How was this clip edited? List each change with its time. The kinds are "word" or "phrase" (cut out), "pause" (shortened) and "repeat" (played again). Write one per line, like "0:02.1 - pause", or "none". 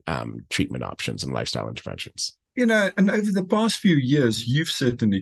0:02.5 - pause